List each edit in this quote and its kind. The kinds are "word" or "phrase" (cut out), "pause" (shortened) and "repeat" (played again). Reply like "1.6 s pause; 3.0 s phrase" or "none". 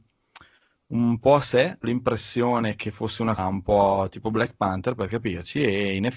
1.8 s word; 3.4 s word